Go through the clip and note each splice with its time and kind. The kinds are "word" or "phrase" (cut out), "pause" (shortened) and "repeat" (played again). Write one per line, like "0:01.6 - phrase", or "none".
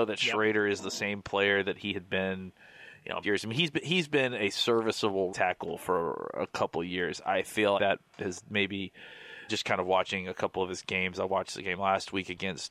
0:03.2 - word
0:05.3 - word
0:07.8 - word
0:09.5 - word